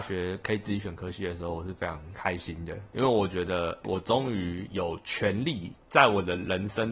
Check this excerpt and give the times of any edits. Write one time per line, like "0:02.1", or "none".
0:03.8